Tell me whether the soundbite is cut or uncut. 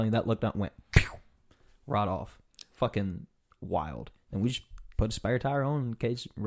uncut